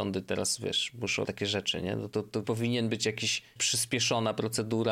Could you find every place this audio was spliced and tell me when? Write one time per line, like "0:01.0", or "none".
0:01.3
0:02.4
0:03.6

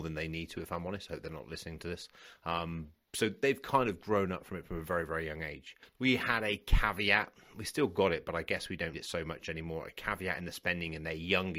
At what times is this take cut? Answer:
0:08.9

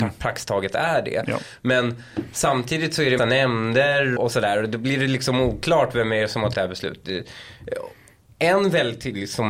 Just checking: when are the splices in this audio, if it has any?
0:03.2
0:04.2
0:06.5

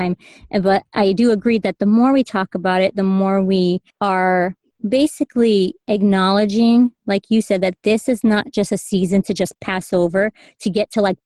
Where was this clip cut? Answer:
0:03.9

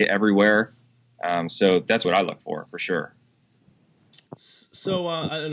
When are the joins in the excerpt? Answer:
0:02.0
0:04.3

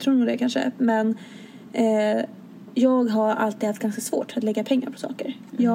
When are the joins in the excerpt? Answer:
none

